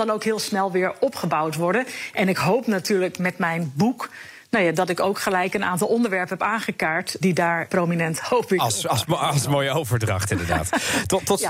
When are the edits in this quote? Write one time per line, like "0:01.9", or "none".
0:07.2
0:07.7